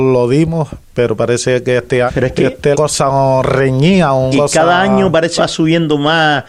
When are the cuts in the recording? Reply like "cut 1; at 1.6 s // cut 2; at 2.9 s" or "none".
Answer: cut 1; at 2.1 s // cut 2; at 2.7 s // cut 3; at 4.3 s // cut 4; at 5.4 s